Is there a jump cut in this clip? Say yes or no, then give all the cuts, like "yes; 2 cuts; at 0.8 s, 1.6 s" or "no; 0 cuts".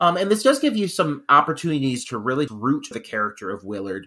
yes; 2 cuts; at 2.5 s, 2.9 s